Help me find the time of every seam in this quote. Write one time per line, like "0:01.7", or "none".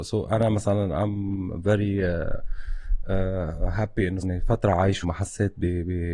0:04.2
0:05.0

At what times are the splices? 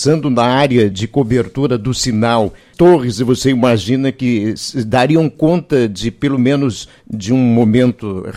0:00.9
0:02.7

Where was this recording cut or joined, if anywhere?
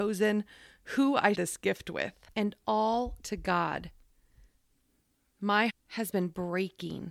0:01.3
0:02.3
0:03.2
0:05.7

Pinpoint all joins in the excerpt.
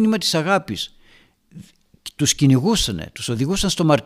none

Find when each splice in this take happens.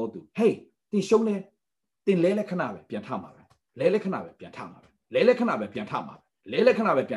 none

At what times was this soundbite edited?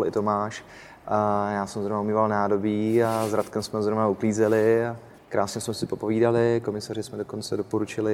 0:05.2

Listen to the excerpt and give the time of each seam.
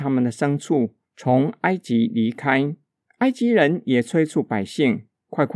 0:01.0
0:03.0

